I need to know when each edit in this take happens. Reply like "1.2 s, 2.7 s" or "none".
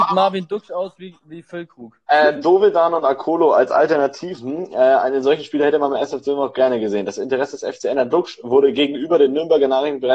none